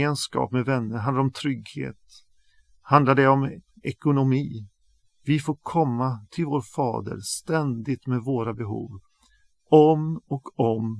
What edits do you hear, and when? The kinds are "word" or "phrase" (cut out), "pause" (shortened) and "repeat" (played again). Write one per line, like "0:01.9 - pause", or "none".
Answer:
none

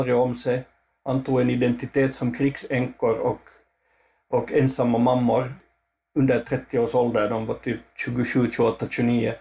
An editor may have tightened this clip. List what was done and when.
none

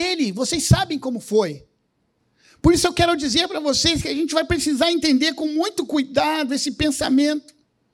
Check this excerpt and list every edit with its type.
none

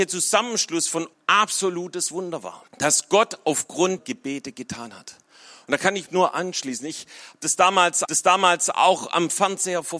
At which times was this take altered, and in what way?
0:01.1 - phrase
0:02.7 - pause
0:04.0 - word
0:06.1 - word
0:08.1 - repeat

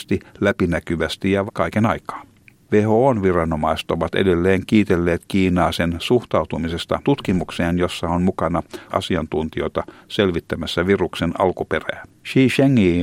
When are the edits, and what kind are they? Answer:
0:01.5 - word
0:07.0 - word
0:08.9 - word

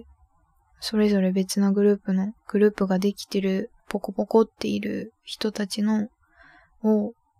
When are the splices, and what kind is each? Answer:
0:02.4 - pause
0:03.8 - pause

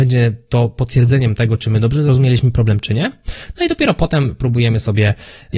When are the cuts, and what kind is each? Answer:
none

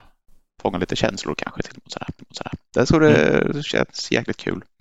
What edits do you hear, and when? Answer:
0:02.2 - repeat

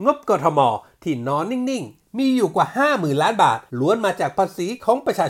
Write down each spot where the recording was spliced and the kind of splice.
0:03.7 - pause

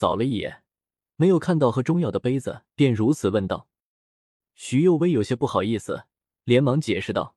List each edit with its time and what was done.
0:02.7 - pause

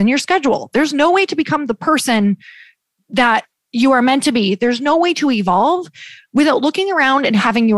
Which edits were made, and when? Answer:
none

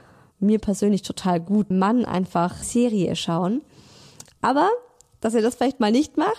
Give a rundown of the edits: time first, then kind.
0:01.7 - phrase
0:02.6 - phrase

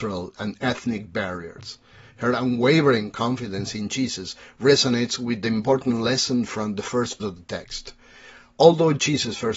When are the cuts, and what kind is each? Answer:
0:07.2 - word

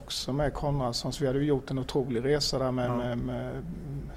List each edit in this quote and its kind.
none

